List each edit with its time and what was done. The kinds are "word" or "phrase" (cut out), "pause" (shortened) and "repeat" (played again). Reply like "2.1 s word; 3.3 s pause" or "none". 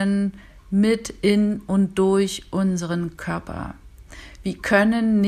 none